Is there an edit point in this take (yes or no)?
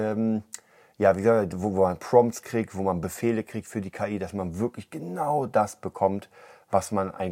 no